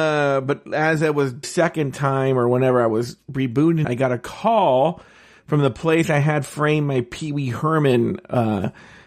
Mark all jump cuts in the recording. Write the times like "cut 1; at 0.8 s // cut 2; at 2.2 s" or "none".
cut 1; at 1.4 s // cut 2; at 3.8 s